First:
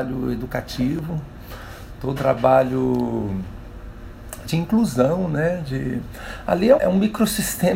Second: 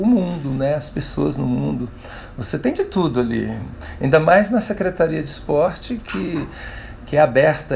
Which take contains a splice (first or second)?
first